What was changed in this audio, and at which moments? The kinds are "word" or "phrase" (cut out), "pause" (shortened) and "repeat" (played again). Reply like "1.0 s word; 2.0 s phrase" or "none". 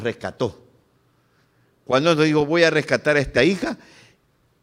3.4 s phrase

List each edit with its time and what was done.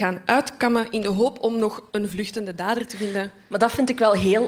1.9 s pause

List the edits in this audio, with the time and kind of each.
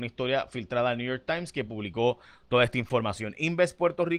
none

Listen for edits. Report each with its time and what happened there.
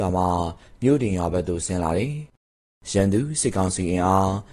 none

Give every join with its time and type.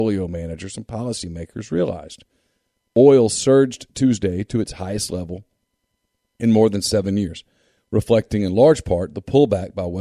none

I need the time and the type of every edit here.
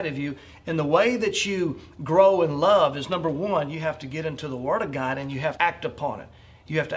5.6 s word

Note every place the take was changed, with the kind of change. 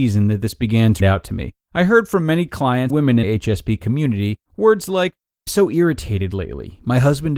1.0 s phrase; 1.6 s pause; 2.9 s word; 3.2 s word; 4.5 s pause; 5.5 s word

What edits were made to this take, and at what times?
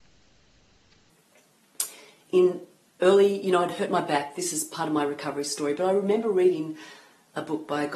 none

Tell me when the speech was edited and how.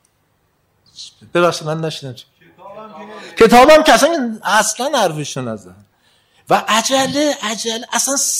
none

